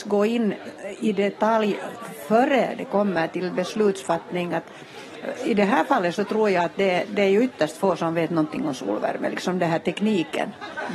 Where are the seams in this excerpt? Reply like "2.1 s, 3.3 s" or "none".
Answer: none